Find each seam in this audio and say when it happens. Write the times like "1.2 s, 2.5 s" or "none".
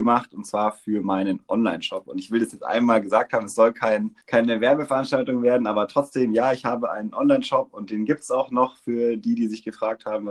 4.2 s